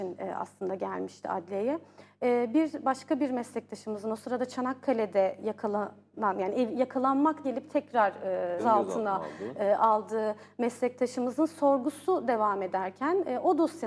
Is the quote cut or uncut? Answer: cut